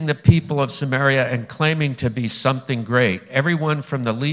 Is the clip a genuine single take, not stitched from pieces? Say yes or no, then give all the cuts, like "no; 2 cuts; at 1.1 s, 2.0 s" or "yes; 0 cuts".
yes; 0 cuts